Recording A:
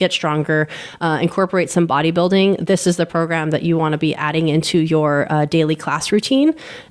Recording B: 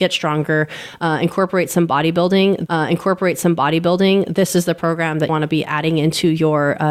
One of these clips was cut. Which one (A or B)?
B